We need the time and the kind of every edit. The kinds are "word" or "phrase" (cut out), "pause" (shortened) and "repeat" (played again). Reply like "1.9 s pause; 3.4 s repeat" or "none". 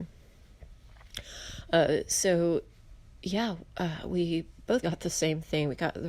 4.8 s word